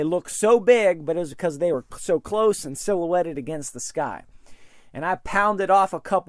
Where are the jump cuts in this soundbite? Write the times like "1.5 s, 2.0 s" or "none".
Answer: none